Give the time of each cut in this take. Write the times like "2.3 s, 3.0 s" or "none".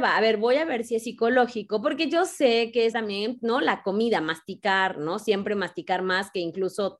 2.9 s, 3.4 s